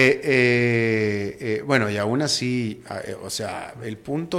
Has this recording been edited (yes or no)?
no